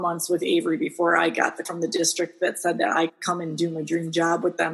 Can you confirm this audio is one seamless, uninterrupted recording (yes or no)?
no